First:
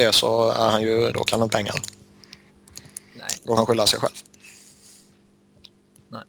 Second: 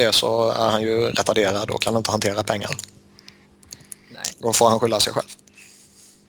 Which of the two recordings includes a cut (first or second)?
first